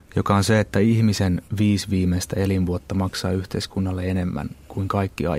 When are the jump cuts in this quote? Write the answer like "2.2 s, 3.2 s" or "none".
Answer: 1.5 s

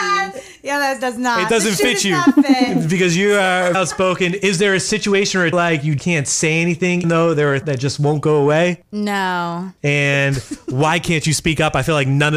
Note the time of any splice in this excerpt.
3.7 s, 5.5 s, 6.0 s, 7.0 s, 7.6 s

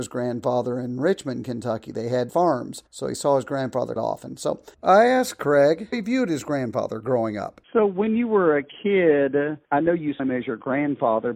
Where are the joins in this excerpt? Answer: 2.3 s, 2.9 s, 4.0 s, 4.7 s, 5.9 s, 7.6 s, 9.6 s, 10.2 s

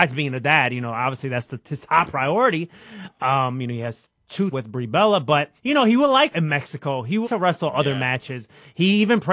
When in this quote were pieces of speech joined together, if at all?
4.5 s, 5.6 s, 6.3 s, 7.2 s

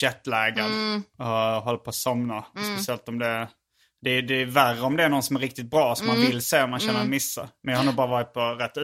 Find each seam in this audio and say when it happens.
none

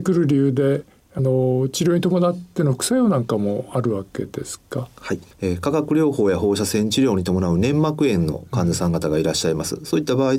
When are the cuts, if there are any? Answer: 5.3 s

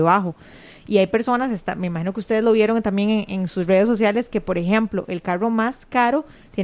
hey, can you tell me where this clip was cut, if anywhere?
none

